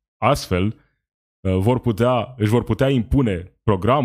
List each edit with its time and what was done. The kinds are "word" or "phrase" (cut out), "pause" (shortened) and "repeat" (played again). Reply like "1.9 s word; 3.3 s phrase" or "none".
none

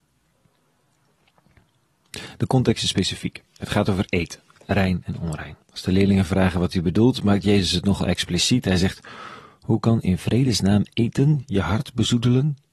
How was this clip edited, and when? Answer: 5.6 s pause

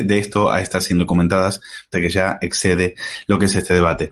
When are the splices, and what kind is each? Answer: 1.9 s word

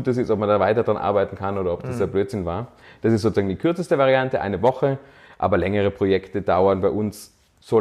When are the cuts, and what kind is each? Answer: none

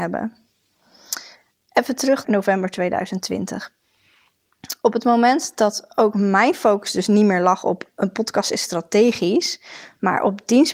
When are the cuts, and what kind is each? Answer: 2.2 s word

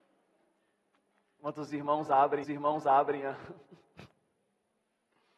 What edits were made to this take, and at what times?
2.4 s repeat

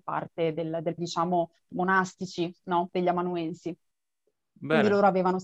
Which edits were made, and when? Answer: 1.0 s word; 1.7 s word

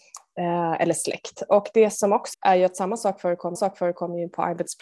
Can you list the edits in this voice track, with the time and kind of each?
2.3 s word; 3.6 s repeat

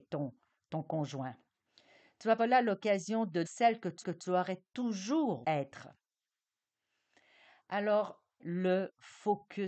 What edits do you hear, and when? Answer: 2.4 s word; 3.4 s word; 4.0 s repeat; 5.4 s word; 8.4 s word

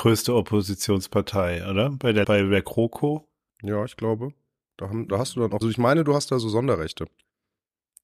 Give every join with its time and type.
2.2 s word; 5.1 s word; 5.6 s word

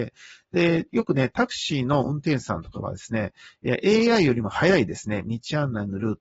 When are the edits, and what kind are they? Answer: none

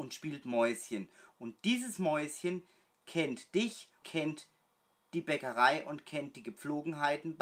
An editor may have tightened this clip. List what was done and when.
4.0 s word

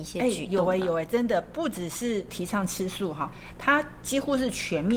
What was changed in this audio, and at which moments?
none

